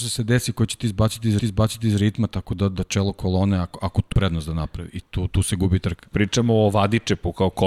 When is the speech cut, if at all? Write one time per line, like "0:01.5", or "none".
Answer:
0:01.4
0:04.1

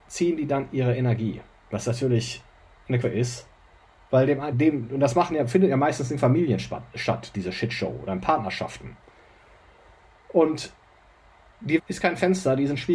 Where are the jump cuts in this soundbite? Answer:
0:03.0
0:04.5
0:11.8

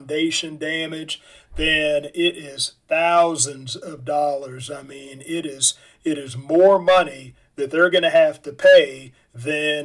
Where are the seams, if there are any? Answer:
none

